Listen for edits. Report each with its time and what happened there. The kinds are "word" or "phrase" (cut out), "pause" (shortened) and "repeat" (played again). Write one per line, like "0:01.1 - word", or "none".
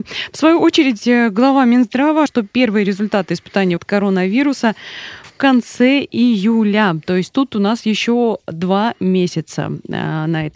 0:02.3 - phrase
0:03.8 - word
0:05.2 - word